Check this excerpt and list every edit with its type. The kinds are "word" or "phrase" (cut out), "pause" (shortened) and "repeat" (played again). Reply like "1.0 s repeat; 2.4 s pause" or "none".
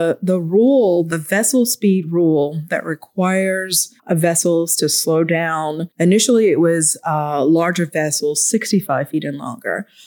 4.0 s pause; 5.9 s pause